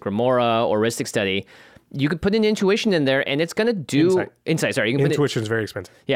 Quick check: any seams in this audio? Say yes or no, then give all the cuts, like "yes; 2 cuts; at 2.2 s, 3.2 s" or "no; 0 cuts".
no; 0 cuts